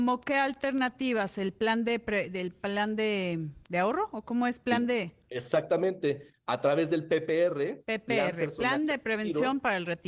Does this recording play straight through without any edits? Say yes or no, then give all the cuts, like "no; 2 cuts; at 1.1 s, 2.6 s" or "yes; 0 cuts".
yes; 0 cuts